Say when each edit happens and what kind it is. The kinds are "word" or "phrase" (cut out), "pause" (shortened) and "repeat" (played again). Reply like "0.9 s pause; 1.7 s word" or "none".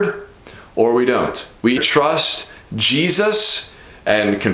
1.8 s word